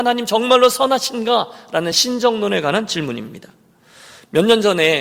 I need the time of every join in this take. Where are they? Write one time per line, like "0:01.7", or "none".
none